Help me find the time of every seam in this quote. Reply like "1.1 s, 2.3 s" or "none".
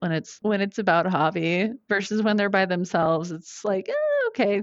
none